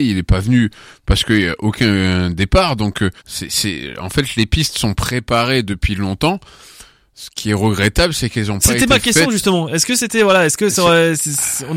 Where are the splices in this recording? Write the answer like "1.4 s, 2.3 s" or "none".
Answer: 3.2 s